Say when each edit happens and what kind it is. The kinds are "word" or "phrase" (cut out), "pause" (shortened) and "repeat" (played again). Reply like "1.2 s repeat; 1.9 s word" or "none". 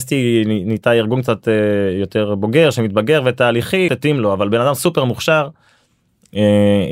3.9 s phrase